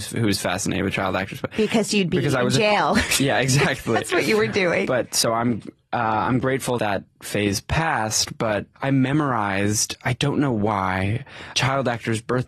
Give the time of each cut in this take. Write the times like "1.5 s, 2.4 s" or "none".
6.8 s